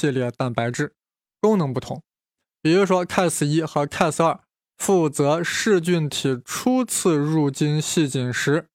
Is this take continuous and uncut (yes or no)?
yes